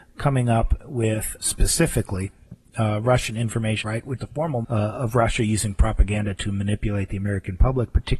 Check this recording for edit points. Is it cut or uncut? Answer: cut